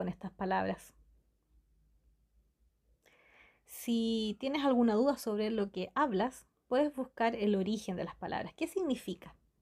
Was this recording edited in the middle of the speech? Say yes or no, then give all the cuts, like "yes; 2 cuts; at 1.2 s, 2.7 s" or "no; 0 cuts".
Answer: no; 0 cuts